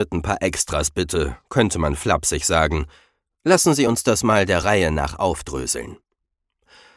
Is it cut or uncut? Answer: uncut